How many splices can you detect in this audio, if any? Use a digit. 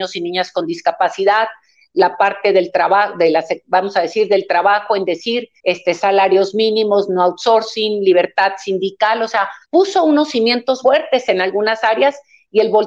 3